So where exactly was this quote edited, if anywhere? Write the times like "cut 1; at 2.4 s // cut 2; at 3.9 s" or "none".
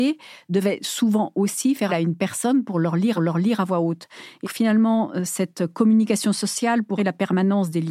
cut 1; at 1.9 s // cut 2; at 3.1 s // cut 3; at 4.4 s // cut 4; at 7.0 s